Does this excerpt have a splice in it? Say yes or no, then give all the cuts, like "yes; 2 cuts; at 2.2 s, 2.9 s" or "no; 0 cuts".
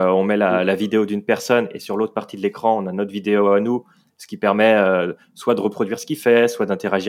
no; 0 cuts